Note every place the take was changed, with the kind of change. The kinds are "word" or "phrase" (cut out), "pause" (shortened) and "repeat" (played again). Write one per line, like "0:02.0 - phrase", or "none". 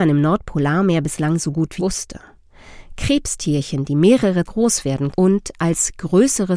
0:01.8 - word
0:04.4 - word
0:05.1 - word